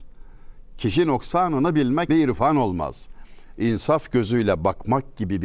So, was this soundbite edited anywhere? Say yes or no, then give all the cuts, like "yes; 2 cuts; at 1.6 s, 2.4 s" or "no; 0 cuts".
yes; 1 cut; at 2.1 s